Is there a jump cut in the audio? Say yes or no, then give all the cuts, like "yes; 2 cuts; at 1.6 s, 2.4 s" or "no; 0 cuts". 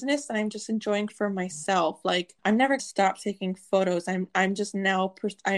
yes; 3 cuts; at 1.1 s, 2.4 s, 2.8 s